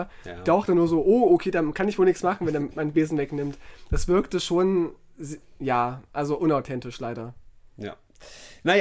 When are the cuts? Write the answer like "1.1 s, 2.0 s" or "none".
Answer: none